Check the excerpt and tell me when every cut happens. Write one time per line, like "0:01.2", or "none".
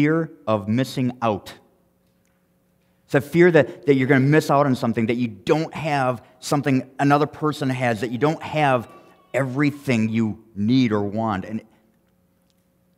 none